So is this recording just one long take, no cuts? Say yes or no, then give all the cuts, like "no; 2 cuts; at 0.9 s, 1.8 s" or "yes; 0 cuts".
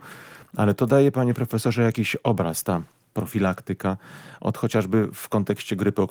yes; 0 cuts